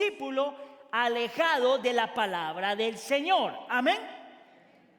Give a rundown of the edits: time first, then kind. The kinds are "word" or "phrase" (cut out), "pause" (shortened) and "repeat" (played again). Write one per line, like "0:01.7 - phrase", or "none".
none

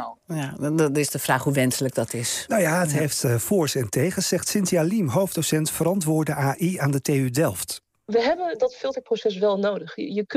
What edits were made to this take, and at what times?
none

